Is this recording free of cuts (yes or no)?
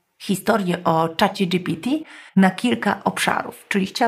no